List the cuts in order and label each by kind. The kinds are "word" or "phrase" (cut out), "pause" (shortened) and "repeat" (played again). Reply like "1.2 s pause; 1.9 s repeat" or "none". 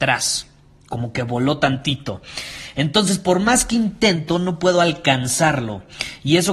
none